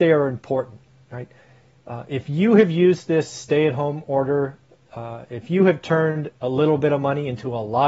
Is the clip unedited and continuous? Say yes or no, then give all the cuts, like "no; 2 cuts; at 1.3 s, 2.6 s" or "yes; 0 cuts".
yes; 0 cuts